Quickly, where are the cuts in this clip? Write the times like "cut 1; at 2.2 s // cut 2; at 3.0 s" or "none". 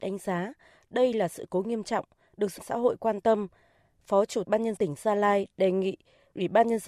cut 1; at 2.6 s // cut 2; at 4.4 s // cut 3; at 4.8 s

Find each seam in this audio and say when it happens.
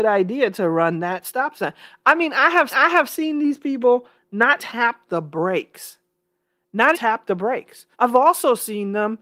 cut 1; at 2.7 s // cut 2; at 4.6 s // cut 3; at 6.9 s // cut 4; at 7.9 s

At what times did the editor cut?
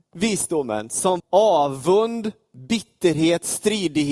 cut 1; at 1.2 s

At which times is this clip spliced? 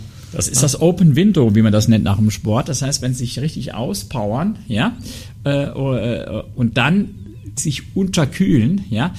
cut 1; at 7.6 s

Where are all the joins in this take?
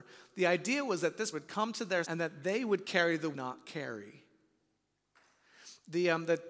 cut 1; at 1.3 s // cut 2; at 2.0 s // cut 3; at 3.3 s

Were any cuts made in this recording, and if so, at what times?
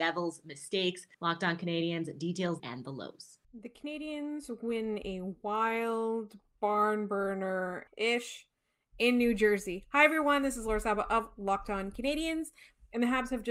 cut 1; at 1.1 s // cut 2; at 2.6 s // cut 3; at 3.4 s // cut 4; at 7.9 s

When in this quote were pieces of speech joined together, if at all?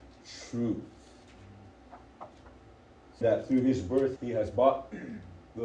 cut 1; at 3.2 s // cut 2; at 4.2 s

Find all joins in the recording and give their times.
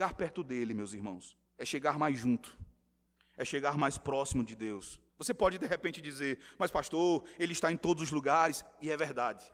cut 1; at 1.5 s // cut 2; at 3.1 s // cut 3; at 5.1 s

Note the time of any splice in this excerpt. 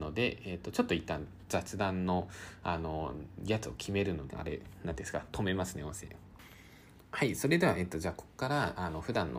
cut 1; at 4.3 s

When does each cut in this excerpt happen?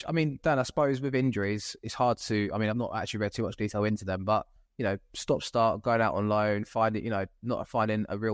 none

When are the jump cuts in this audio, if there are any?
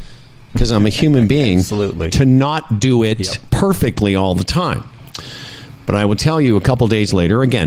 none

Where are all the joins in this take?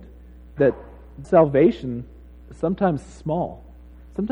cut 1; at 1.2 s

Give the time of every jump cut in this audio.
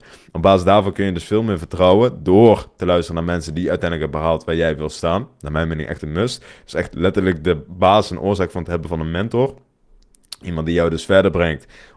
none

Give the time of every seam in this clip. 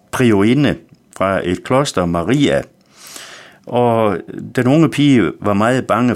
none

